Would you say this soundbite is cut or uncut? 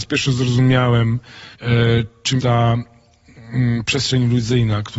cut